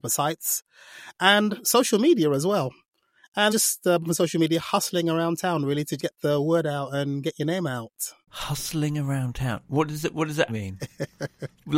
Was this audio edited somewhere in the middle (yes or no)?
yes